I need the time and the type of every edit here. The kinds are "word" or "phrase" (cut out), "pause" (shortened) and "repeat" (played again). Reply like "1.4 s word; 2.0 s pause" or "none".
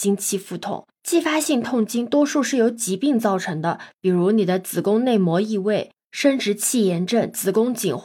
1.0 s pause